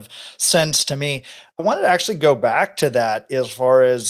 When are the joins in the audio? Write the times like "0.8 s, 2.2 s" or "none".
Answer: 1.6 s